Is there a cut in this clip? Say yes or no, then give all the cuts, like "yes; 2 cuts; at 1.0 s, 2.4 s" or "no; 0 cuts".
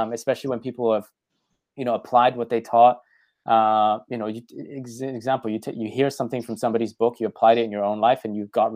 no; 0 cuts